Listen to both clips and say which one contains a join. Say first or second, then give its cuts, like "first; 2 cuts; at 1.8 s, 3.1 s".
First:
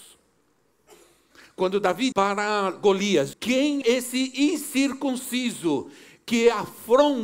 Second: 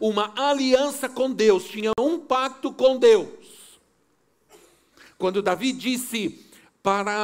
first; 3 cuts; at 2.1 s, 3.3 s, 3.8 s